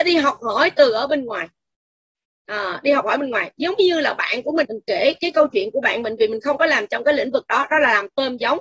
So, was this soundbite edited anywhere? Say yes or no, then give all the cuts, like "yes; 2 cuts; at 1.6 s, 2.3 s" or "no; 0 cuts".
yes; 1 cut; at 4.6 s